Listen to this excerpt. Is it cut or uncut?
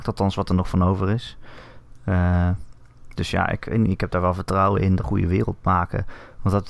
cut